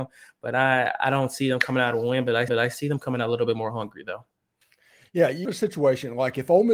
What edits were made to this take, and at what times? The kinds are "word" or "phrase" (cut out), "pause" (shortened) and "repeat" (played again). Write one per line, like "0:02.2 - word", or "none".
0:02.5 - repeat
0:05.4 - word